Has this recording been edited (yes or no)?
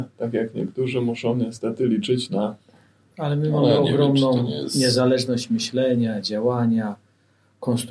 no